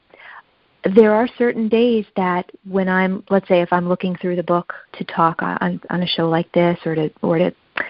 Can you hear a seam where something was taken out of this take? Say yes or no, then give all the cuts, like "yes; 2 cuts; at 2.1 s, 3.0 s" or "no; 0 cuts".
yes; 1 cut; at 4.8 s